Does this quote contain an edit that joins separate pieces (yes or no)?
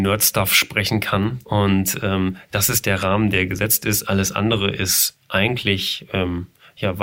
yes